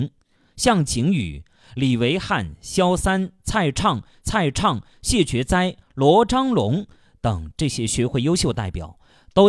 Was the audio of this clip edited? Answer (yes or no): yes